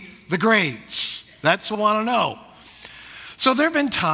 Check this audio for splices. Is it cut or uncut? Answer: cut